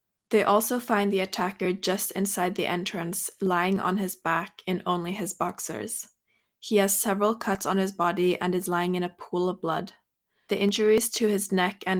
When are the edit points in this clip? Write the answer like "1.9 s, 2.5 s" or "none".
none